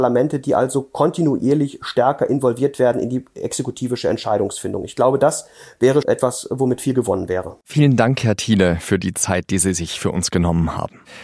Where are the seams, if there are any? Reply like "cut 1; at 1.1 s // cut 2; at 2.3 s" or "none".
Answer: cut 1; at 6.0 s // cut 2; at 7.6 s